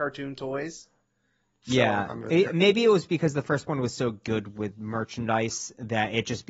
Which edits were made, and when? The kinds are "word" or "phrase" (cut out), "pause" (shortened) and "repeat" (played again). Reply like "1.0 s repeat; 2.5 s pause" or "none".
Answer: none

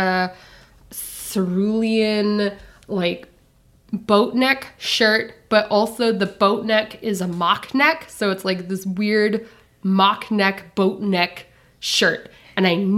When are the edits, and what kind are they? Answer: none

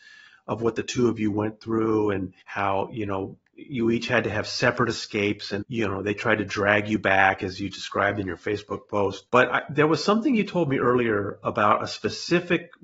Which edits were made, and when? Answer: 2.4 s pause; 5.6 s word; 9.3 s pause

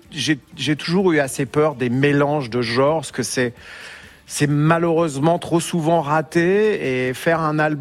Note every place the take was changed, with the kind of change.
3.1 s phrase

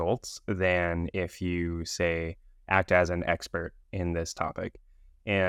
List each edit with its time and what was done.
none

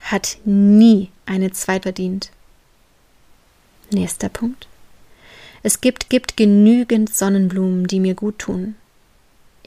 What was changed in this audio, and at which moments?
1.2 s pause; 1.8 s word; 6.1 s repeat

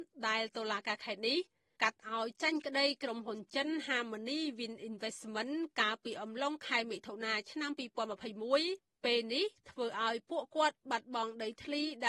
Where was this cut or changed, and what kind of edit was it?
none

